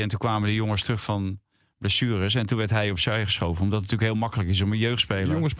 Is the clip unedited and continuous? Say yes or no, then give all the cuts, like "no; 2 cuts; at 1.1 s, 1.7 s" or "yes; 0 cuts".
yes; 0 cuts